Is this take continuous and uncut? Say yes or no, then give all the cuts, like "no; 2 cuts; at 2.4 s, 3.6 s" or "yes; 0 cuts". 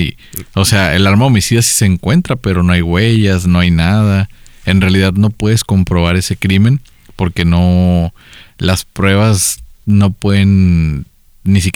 yes; 0 cuts